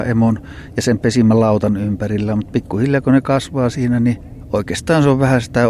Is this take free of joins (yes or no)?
yes